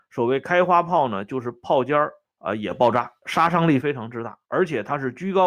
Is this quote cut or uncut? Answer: cut